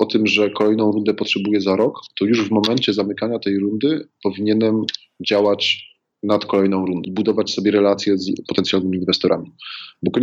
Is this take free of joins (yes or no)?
yes